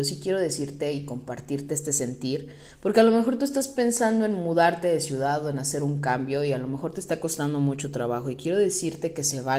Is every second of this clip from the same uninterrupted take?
yes; 0 cuts

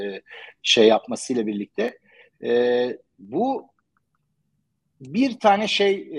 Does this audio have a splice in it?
no; 0 cuts

